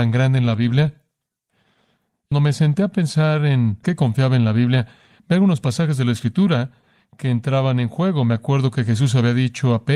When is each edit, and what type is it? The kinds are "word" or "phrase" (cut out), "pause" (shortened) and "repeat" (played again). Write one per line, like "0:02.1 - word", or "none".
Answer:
0:02.3 - word
0:03.8 - word